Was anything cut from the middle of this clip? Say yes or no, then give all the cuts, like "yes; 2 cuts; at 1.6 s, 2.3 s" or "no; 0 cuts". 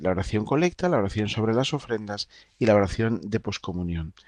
no; 0 cuts